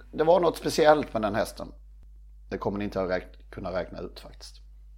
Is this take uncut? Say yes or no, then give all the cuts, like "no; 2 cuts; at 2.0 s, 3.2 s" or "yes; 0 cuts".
yes; 0 cuts